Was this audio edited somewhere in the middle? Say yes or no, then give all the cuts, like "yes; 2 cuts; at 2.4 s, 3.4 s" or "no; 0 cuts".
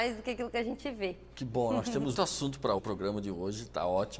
yes; 2 cuts; at 2.1 s, 2.8 s